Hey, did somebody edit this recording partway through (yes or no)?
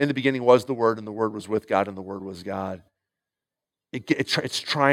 no